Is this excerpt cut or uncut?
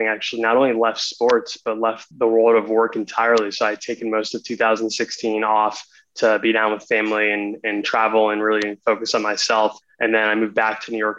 cut